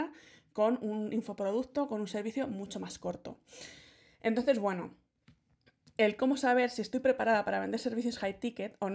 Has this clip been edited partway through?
no; 0 cuts

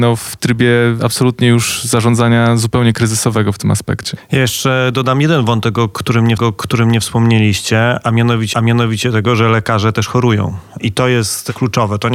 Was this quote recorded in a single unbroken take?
no; 2 cuts; at 6.4 s, 8.5 s

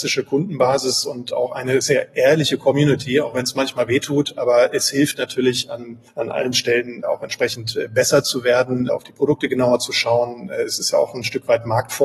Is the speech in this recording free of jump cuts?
no; 1 cut; at 6.1 s

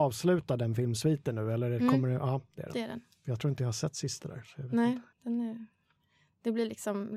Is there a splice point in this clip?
yes; 1 cut; at 5.1 s

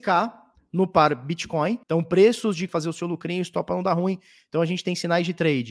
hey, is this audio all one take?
no; 2 cuts; at 1.8 s, 2.7 s

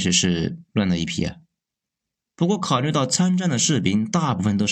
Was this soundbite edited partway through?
no; 0 cuts

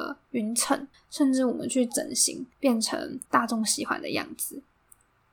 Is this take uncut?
no; 3 cuts; at 0.9 s, 2.5 s, 3.2 s

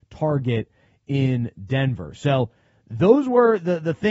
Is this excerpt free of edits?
yes; 0 cuts

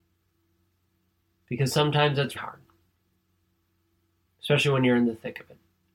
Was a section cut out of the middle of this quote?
yes; 1 cut; at 2.3 s

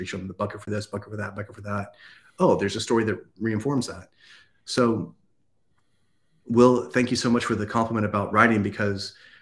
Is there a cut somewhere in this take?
no; 0 cuts

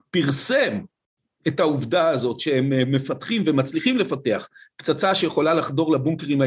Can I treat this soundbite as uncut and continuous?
yes; 0 cuts

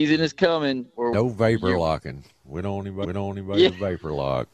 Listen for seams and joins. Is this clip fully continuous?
no; 2 cuts; at 1.1 s, 3.0 s

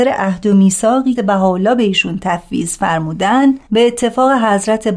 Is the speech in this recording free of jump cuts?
no; 2 cuts; at 1.1 s, 3.6 s

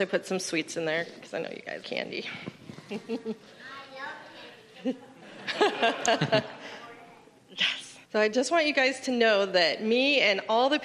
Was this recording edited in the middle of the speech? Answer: yes; 2 cuts; at 1.8 s, 8.0 s

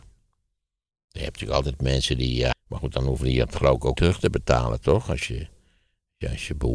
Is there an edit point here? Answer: yes; 2 cuts; at 2.5 s, 4.0 s

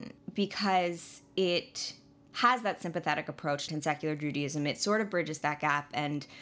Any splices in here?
yes; 1 cut; at 3.7 s

